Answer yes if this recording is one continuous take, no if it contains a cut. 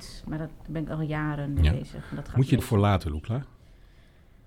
no